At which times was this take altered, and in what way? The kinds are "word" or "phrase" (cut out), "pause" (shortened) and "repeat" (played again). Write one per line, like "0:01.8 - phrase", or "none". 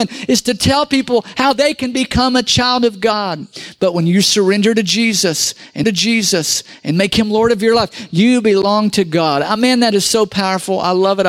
0:05.8 - repeat